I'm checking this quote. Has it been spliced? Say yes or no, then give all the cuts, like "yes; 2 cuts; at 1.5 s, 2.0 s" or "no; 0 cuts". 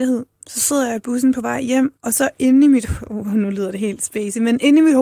yes; 1 cut; at 2.0 s